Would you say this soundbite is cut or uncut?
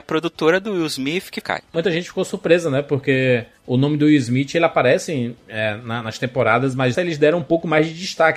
cut